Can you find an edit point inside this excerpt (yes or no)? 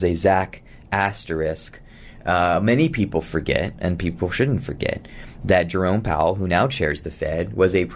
no